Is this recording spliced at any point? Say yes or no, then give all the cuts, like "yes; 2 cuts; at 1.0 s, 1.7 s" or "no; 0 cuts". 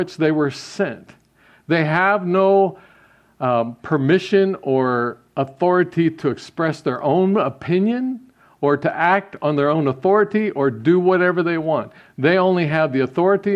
no; 0 cuts